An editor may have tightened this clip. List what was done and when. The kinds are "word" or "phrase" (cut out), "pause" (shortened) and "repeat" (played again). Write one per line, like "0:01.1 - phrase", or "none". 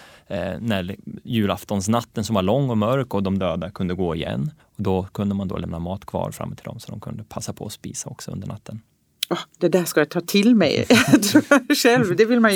0:04.6 - pause